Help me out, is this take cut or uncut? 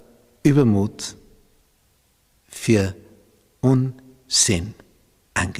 uncut